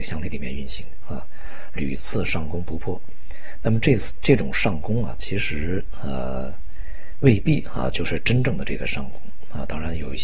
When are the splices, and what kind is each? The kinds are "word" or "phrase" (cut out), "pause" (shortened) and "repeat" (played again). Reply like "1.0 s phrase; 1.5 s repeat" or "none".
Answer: 1.8 s phrase